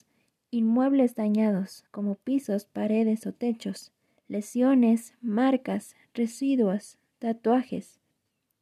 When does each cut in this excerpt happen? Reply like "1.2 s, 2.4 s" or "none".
1.9 s, 4.2 s